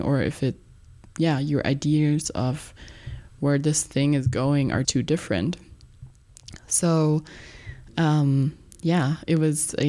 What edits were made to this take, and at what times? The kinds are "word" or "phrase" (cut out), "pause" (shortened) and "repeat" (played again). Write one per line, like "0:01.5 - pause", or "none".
0:04.8 - word

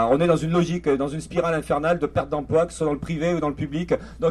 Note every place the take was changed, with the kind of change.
none

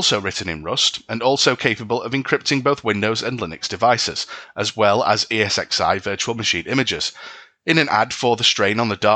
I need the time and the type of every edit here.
none

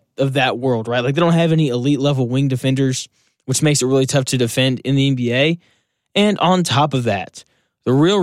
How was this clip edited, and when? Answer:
none

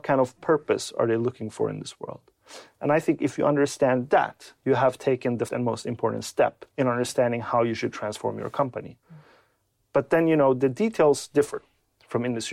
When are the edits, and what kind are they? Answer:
0:04.6 - pause
0:05.5 - word
0:06.7 - pause
0:09.0 - pause

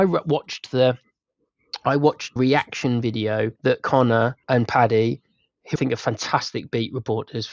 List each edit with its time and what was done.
0:02.4 - word
0:03.6 - pause
0:04.4 - pause
0:05.8 - word

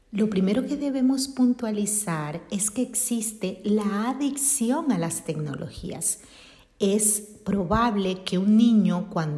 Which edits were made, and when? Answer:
none

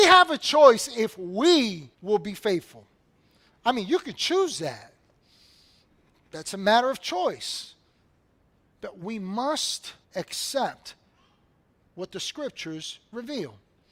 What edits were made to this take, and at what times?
0:01.9 - pause
0:10.0 - pause

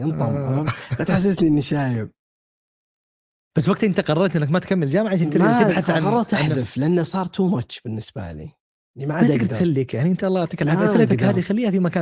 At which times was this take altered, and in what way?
0:08.6 - pause

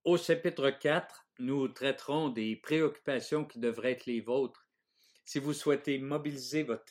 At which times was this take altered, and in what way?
none

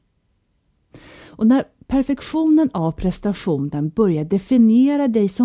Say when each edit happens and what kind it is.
none

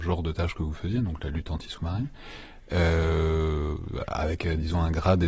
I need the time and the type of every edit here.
none

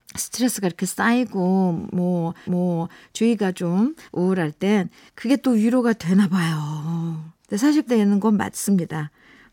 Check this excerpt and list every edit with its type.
0:02.5 - repeat
0:04.1 - pause
0:05.1 - pause
0:07.4 - pause
0:07.9 - word

